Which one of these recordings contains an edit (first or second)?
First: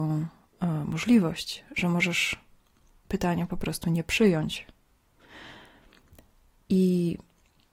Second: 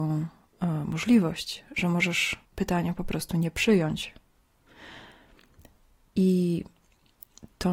second